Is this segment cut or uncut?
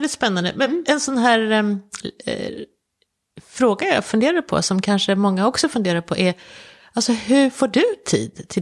uncut